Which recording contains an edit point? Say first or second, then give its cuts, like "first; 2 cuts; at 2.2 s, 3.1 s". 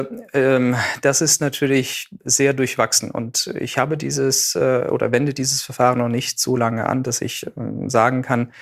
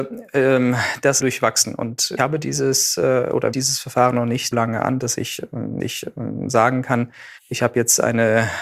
second; 6 cuts; at 1.2 s, 2.2 s, 3.5 s, 4.5 s, 5.8 s, 7.4 s